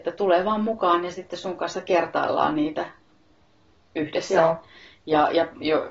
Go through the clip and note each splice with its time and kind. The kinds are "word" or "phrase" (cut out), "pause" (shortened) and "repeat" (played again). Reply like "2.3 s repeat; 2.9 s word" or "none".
none